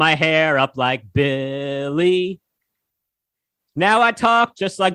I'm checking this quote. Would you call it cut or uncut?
uncut